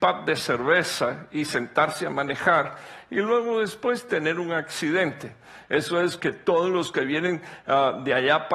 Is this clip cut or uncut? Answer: cut